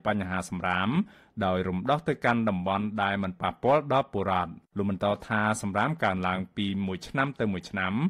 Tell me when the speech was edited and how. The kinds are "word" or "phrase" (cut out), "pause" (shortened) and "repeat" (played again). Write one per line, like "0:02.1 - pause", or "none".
0:04.7 - pause